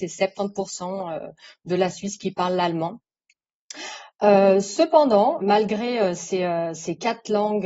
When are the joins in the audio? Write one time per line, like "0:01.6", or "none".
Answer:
0:05.4